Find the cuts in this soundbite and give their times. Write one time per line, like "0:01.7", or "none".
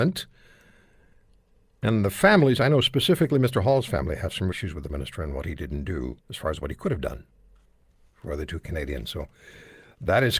0:04.5
0:04.9
0:06.2